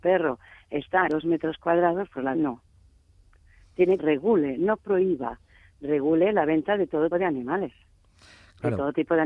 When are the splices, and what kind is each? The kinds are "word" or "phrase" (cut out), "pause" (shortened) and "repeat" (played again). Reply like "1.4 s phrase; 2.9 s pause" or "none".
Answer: 1.1 s word; 2.3 s word; 4.0 s phrase; 7.1 s word